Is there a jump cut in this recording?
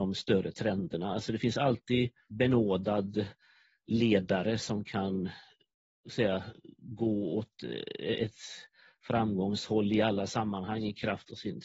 yes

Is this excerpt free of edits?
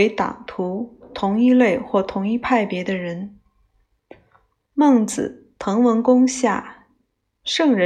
yes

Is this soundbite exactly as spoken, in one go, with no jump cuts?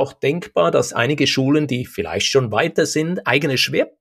yes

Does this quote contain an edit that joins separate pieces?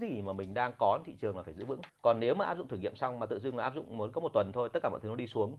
yes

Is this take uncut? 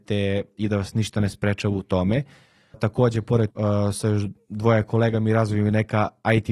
no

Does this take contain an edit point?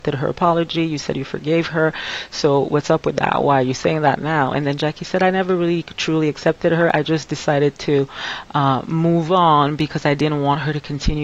no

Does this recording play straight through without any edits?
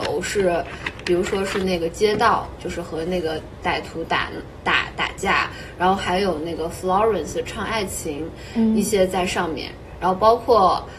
yes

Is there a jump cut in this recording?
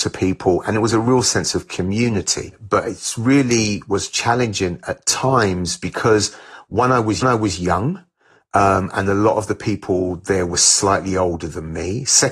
yes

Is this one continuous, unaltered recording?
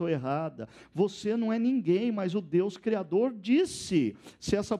yes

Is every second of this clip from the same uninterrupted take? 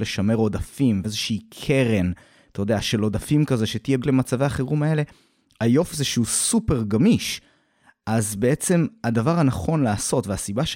no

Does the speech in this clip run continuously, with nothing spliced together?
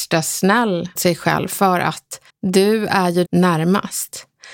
no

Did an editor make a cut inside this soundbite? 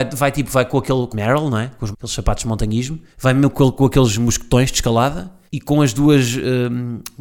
yes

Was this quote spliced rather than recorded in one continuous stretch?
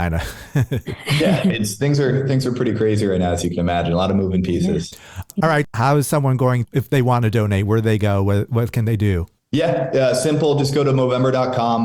no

